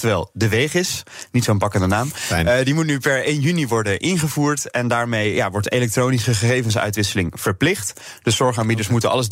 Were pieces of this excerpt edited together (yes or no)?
no